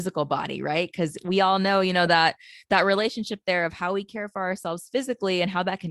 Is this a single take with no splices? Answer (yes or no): yes